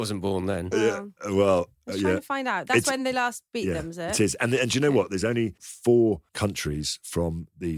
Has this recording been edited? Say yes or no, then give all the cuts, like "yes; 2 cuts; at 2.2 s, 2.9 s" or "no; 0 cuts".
no; 0 cuts